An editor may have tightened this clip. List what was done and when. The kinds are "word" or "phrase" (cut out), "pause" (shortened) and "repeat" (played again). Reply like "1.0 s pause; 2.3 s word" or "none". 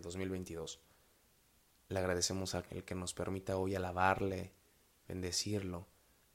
2.7 s word